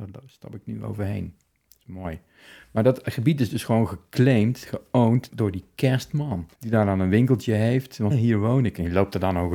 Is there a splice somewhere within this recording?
yes; 3 cuts; at 5.3 s, 6.5 s, 8.1 s

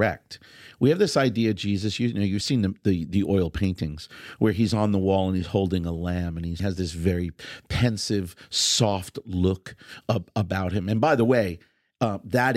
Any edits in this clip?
no; 0 cuts

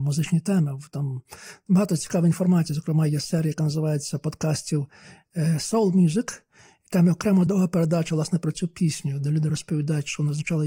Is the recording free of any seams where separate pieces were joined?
yes; 0 cuts

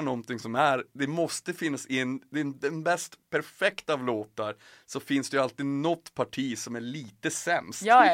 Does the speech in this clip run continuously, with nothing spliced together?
yes; 0 cuts

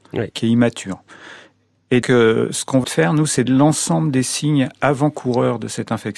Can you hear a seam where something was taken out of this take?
yes; 3 cuts; at 2.0 s, 2.8 s, 3.5 s

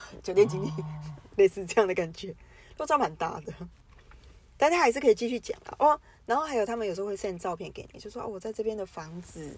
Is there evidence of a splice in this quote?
no; 0 cuts

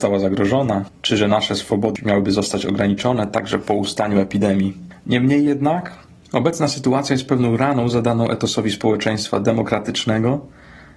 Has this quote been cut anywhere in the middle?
no; 0 cuts

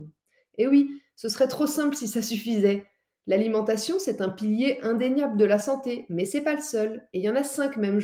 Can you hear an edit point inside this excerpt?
no; 0 cuts

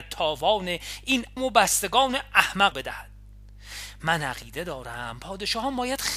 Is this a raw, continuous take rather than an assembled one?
no; 2 cuts; at 1.4 s, 2.7 s

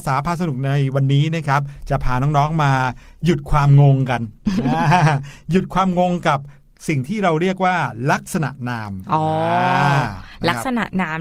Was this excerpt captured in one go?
yes; 0 cuts

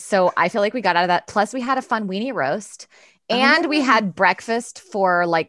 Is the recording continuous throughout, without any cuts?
yes; 0 cuts

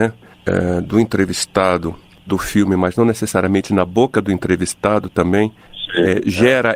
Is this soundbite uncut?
no; 1 cut; at 2.3 s

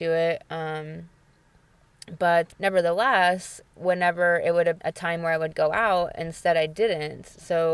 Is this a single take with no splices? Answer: no; 2 cuts; at 2.5 s, 4.8 s

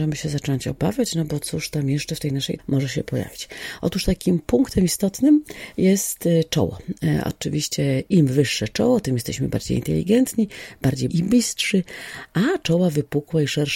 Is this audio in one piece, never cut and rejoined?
no; 2 cuts; at 2.6 s, 11.1 s

